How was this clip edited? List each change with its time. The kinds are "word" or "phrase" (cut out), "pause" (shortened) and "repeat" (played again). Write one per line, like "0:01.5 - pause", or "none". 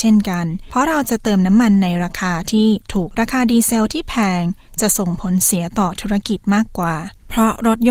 0:03.1 - phrase